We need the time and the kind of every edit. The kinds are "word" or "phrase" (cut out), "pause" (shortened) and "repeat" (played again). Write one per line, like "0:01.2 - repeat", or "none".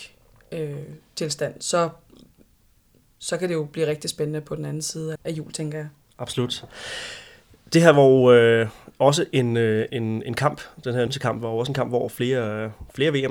0:05.2 - word
0:09.9 - word
0:11.1 - word